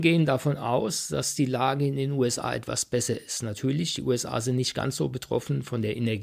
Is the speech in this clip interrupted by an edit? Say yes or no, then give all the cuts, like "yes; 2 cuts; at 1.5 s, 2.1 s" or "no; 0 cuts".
no; 0 cuts